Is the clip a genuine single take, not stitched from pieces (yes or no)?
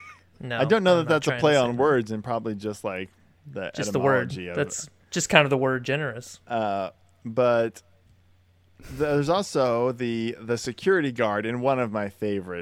yes